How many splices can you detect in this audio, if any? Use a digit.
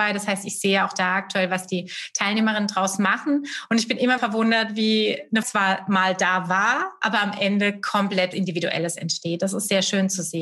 3